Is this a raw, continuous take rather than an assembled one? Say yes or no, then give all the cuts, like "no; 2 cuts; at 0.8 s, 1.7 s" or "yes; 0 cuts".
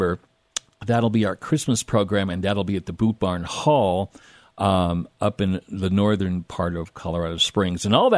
yes; 0 cuts